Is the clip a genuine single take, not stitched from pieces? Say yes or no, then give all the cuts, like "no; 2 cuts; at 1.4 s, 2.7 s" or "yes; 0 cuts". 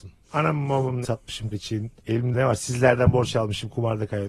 no; 3 cuts; at 1.0 s, 1.5 s, 2.3 s